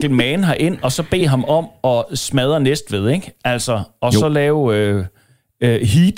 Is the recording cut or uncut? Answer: uncut